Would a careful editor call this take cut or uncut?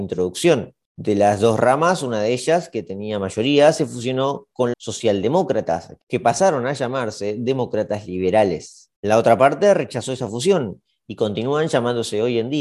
cut